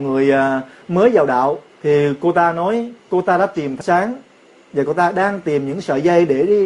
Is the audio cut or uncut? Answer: cut